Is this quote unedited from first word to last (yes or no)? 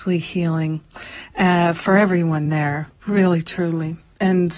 yes